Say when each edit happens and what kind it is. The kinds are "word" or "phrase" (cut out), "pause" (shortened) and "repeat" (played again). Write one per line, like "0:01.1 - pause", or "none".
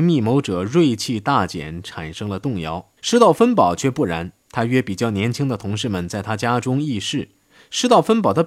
0:03.0 - pause
0:04.4 - pause
0:07.5 - pause